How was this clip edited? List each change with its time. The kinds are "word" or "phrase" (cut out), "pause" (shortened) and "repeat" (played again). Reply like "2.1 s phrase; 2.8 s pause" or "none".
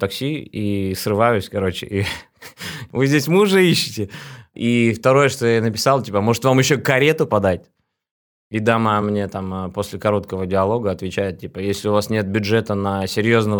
none